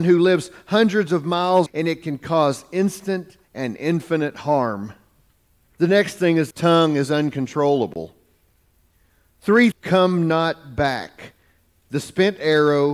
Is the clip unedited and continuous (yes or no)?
no